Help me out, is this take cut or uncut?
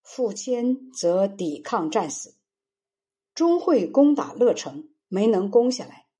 uncut